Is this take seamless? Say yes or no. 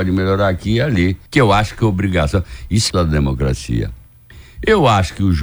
no